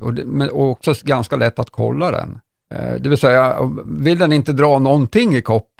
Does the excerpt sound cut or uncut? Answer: uncut